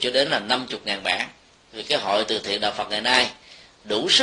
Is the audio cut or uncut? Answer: uncut